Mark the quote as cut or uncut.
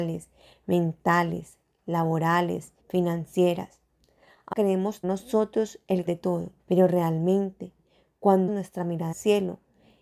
cut